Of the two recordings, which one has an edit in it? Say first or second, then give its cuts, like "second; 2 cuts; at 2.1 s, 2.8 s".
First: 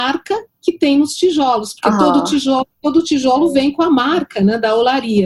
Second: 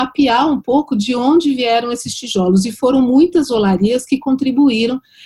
first; 1 cut; at 2.7 s